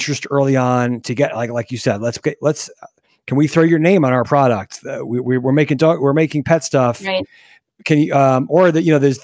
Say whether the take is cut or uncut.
uncut